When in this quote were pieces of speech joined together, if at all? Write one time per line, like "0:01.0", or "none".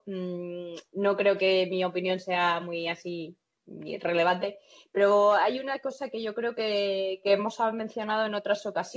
none